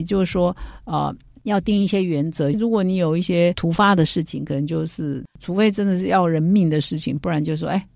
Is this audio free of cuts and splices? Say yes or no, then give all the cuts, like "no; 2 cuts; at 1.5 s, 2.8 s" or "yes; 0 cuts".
no; 1 cut; at 2.5 s